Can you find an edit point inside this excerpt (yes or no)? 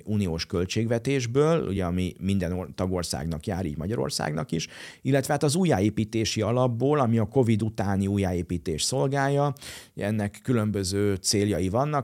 no